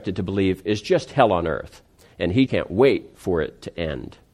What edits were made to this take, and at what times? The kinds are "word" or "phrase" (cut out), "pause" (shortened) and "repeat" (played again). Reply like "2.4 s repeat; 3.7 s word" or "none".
2.5 s word